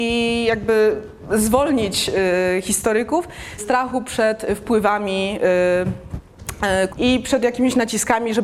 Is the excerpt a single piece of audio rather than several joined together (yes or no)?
no